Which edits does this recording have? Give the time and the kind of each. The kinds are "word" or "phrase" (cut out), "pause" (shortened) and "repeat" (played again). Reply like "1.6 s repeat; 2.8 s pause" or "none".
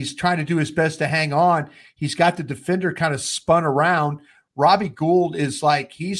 none